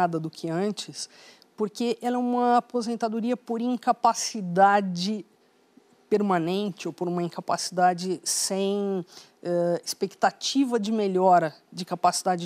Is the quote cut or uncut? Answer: uncut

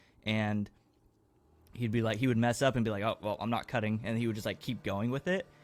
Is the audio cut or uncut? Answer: uncut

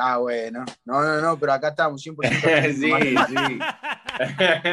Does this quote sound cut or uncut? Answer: uncut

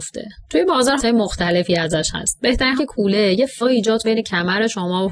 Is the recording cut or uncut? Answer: cut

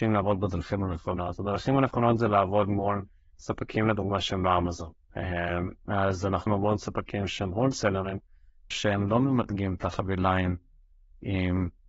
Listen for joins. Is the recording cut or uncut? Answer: cut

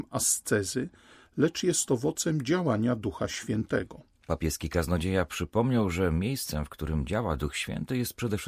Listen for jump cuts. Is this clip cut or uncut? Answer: uncut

